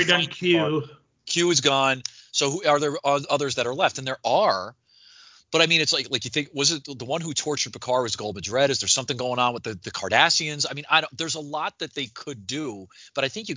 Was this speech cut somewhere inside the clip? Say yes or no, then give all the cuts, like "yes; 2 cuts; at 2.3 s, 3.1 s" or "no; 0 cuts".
no; 0 cuts